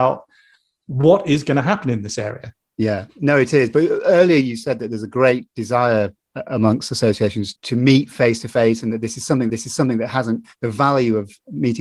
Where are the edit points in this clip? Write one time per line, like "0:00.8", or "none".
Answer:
0:07.6
0:09.5